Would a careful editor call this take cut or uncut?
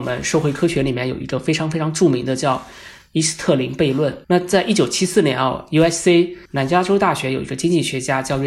cut